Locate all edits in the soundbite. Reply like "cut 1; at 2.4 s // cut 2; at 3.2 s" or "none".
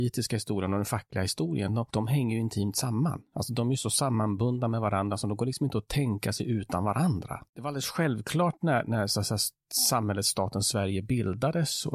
cut 1; at 7.5 s